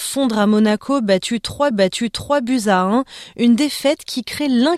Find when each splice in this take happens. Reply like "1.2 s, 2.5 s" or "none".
1.7 s